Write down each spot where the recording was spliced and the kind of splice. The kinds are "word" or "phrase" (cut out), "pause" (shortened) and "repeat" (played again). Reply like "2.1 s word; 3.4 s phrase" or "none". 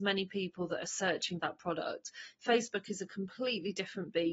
1.4 s word